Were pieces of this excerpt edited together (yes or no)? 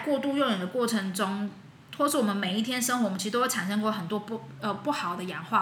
no